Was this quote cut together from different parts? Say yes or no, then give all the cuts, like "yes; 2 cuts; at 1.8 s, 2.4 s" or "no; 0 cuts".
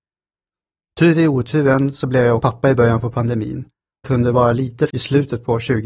yes; 3 cuts; at 2.4 s, 4.0 s, 4.9 s